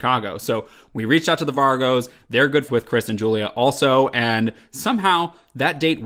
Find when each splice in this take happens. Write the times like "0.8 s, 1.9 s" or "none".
2.7 s